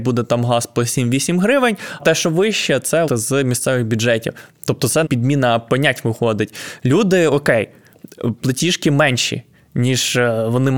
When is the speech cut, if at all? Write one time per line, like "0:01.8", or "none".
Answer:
0:02.0
0:03.1
0:05.0
0:08.4